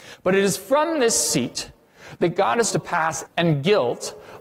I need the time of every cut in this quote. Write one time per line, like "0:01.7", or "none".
0:02.7
0:03.3